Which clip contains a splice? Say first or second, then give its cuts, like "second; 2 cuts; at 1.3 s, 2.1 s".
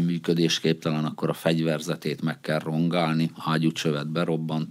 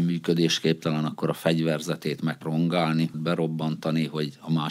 second; 2 cuts; at 2.4 s, 3.1 s